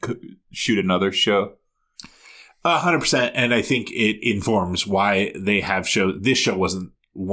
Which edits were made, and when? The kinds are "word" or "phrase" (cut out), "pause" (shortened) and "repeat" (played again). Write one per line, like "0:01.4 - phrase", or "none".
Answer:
none